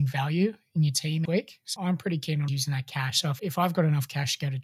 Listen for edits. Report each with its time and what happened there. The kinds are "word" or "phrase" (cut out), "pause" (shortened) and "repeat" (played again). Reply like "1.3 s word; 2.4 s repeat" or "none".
1.2 s word; 1.8 s word; 2.5 s word; 3.4 s word